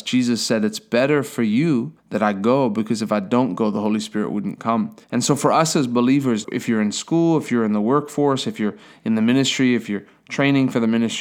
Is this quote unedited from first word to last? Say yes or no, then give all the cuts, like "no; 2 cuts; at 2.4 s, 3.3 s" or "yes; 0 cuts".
no; 3 cuts; at 2.0 s, 5.0 s, 6.4 s